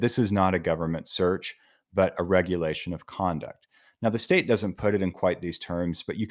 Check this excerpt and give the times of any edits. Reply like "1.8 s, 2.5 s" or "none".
none